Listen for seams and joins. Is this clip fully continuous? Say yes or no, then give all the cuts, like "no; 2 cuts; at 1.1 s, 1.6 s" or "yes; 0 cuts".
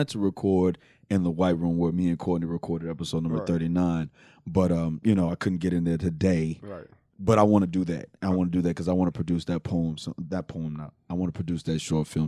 yes; 0 cuts